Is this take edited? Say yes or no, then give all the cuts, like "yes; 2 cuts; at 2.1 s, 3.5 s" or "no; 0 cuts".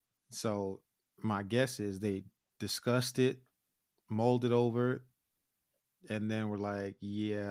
no; 0 cuts